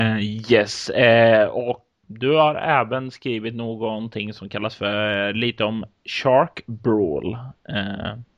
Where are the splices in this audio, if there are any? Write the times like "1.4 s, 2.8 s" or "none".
2.0 s